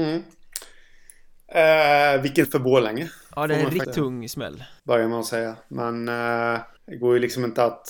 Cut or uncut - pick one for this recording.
cut